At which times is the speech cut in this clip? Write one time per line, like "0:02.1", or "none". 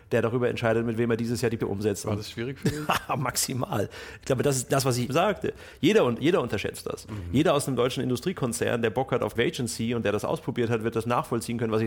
0:01.6
0:05.1
0:09.4